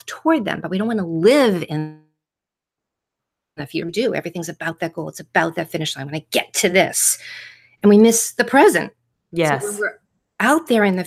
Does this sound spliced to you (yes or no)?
no